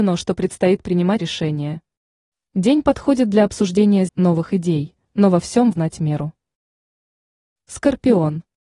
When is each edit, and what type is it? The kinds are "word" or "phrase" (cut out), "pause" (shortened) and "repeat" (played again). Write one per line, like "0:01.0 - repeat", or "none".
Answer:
0:01.2 - word
0:04.1 - phrase
0:05.0 - pause
0:05.7 - word